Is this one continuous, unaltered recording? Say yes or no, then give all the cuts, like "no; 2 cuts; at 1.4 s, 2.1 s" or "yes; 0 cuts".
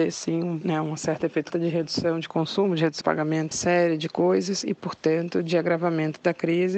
no; 3 cuts; at 1.5 s, 3.0 s, 3.5 s